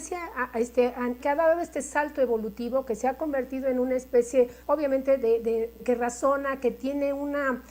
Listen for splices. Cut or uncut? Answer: cut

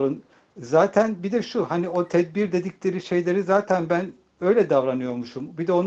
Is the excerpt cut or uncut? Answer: uncut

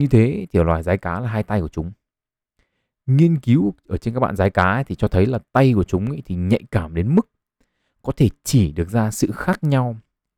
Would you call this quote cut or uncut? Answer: uncut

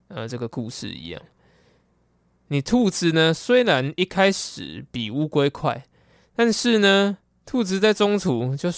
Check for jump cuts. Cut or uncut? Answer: uncut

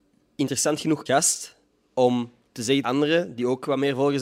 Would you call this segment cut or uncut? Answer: cut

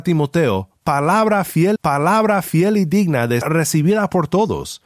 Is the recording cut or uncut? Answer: cut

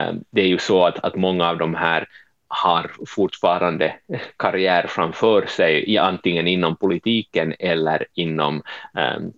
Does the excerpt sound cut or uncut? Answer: uncut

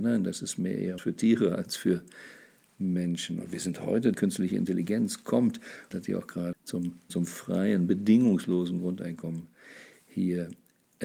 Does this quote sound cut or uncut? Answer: cut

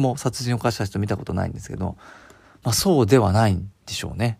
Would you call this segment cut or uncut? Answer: uncut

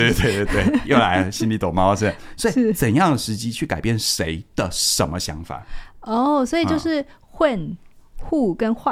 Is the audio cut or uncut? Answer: uncut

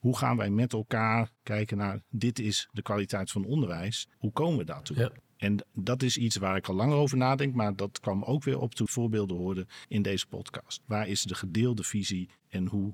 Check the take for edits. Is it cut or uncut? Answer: cut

